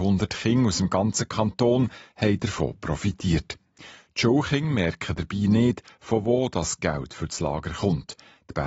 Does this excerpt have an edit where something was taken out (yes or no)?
no